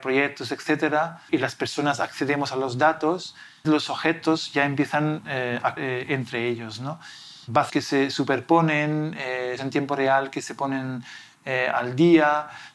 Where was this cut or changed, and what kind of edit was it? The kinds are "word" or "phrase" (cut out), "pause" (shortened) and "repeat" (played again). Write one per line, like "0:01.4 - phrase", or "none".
0:01.3 - word
0:03.6 - phrase
0:05.8 - word
0:07.7 - phrase
0:09.6 - word